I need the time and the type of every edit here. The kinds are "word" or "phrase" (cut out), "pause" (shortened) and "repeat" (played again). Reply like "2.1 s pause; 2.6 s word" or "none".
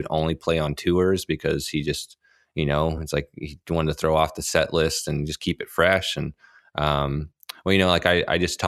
none